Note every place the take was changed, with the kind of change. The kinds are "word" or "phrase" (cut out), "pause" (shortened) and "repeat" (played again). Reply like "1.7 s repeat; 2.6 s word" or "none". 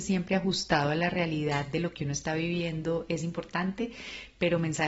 none